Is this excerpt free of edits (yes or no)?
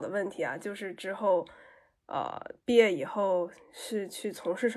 yes